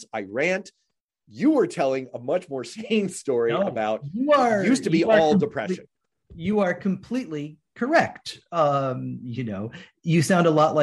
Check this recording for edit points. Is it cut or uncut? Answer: uncut